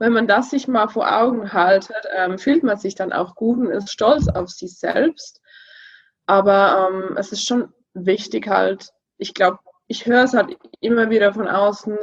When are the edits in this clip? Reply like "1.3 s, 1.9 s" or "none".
none